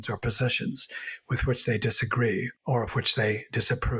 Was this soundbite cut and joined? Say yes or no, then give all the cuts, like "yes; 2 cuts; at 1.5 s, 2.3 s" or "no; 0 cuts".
yes; 1 cut; at 2.6 s